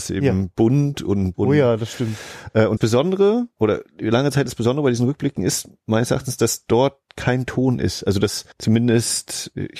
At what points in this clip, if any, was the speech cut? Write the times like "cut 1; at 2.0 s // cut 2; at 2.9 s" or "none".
cut 1; at 1.3 s // cut 2; at 2.8 s // cut 3; at 3.5 s // cut 4; at 8.5 s

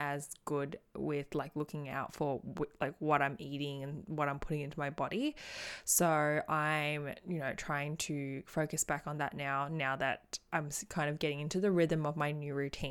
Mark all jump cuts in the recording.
none

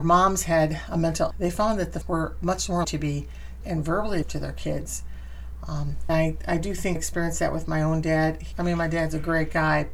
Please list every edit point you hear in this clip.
cut 1; at 1.3 s // cut 2; at 2.0 s // cut 3; at 2.8 s // cut 4; at 3.6 s // cut 5; at 4.2 s // cut 6; at 6.1 s // cut 7; at 7.0 s // cut 8; at 8.5 s

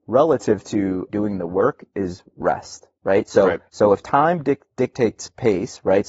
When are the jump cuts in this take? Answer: cut 1; at 1.1 s // cut 2; at 2.9 s // cut 3; at 3.7 s

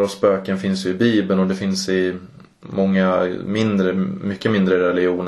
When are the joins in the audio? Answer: none

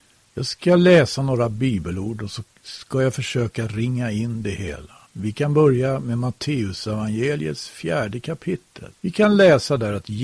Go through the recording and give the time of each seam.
cut 1; at 2.5 s // cut 2; at 5.1 s // cut 3; at 9.0 s

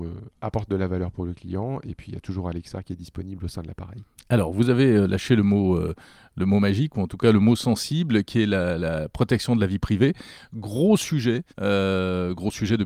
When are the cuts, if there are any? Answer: cut 1; at 11.5 s

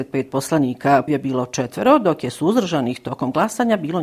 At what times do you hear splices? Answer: cut 1; at 1.1 s

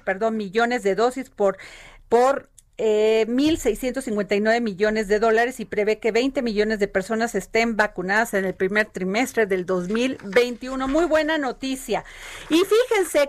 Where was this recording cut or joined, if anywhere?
none

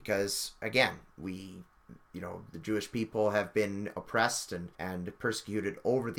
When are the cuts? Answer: cut 1; at 4.7 s

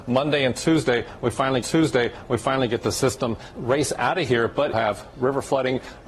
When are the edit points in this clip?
cut 1; at 1.6 s // cut 2; at 3.5 s // cut 3; at 4.7 s

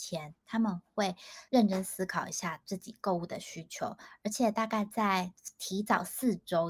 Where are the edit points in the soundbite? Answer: cut 1; at 1.5 s

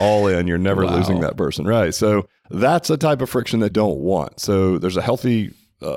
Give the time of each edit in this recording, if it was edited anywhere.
cut 1; at 2.4 s // cut 2; at 3.7 s

